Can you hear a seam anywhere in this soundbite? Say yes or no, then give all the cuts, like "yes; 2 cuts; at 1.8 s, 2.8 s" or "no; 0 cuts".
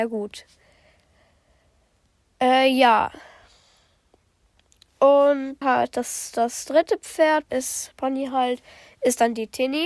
yes; 3 cuts; at 5.6 s, 7.5 s, 7.9 s